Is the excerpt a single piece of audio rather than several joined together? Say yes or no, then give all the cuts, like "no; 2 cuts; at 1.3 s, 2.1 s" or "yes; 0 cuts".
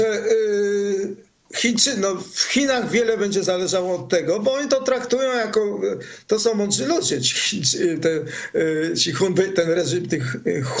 yes; 0 cuts